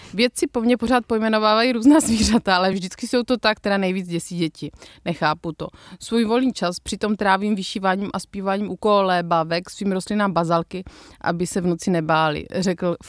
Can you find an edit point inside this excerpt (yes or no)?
no